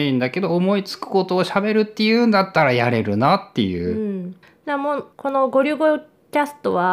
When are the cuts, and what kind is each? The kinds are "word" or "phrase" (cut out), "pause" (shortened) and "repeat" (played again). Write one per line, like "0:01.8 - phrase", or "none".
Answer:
0:05.1 - pause